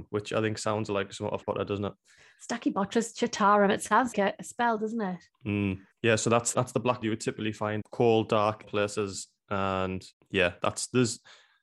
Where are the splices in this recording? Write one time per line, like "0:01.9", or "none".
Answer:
0:01.4
0:04.1
0:05.9
0:06.5
0:07.0
0:07.8
0:08.6
0:10.1